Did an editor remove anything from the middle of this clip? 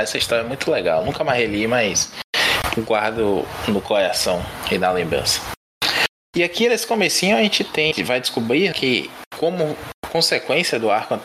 yes; 2 cuts; at 7.9 s, 8.7 s

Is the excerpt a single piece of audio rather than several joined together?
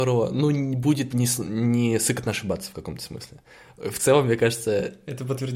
yes; 0 cuts

